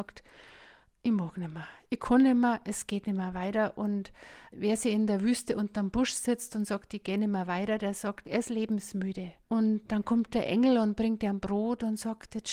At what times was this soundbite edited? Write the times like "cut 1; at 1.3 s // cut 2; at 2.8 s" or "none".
cut 1; at 9.4 s